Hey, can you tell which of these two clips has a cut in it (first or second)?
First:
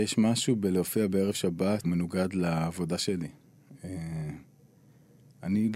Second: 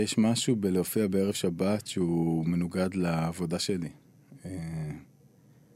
first